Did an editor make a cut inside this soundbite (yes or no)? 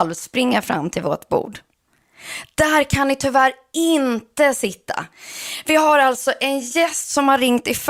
no